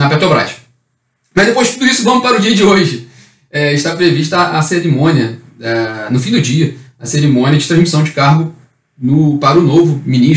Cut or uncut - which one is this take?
uncut